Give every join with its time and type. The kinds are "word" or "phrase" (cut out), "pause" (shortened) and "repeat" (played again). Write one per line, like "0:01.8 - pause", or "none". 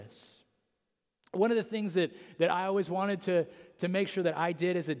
none